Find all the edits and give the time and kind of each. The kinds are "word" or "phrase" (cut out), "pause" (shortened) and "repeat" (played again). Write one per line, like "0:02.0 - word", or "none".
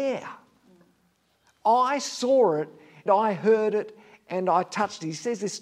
0:03.1 - word